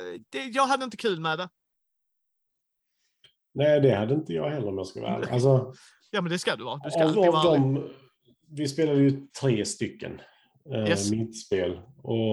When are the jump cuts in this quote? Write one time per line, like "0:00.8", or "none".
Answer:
none